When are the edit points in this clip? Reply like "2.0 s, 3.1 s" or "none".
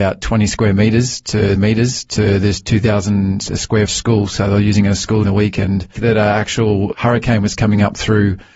1.6 s, 3.9 s, 5.2 s, 6.0 s, 6.9 s